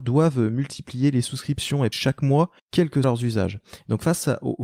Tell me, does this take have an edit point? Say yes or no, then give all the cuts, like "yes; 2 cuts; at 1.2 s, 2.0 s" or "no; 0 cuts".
yes; 3 cuts; at 1.9 s, 2.6 s, 3.0 s